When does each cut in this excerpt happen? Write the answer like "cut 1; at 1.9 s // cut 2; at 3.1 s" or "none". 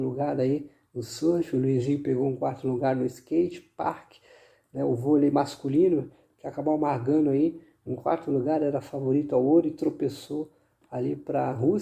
none